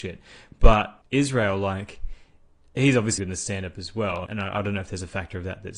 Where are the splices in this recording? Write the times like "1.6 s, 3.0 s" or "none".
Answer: 1.0 s, 3.2 s, 4.3 s